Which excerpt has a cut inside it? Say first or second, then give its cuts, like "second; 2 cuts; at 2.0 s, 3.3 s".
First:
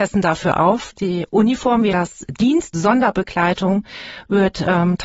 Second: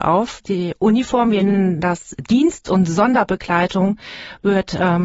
first; 2 cuts; at 1.9 s, 2.7 s